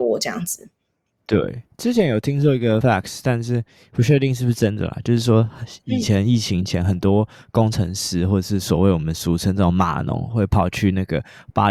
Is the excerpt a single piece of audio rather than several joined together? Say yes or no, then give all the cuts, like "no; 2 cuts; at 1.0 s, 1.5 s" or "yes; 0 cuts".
no; 1 cut; at 2.8 s